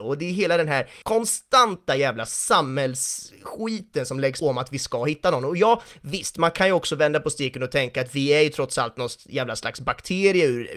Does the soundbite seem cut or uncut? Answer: cut